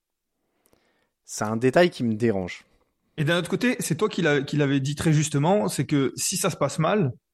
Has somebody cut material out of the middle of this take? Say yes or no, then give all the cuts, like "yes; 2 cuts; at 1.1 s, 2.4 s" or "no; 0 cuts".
no; 0 cuts